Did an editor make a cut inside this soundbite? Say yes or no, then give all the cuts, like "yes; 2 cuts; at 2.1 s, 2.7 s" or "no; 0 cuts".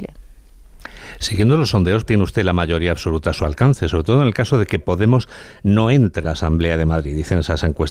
yes; 2 cuts; at 2.1 s, 6.2 s